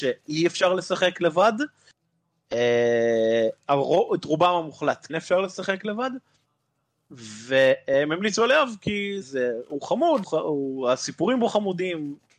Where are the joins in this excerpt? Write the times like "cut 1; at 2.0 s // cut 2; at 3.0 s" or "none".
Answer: cut 1; at 5.1 s // cut 2; at 9.2 s // cut 3; at 10.2 s